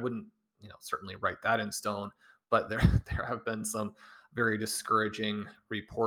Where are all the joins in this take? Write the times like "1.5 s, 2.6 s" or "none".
none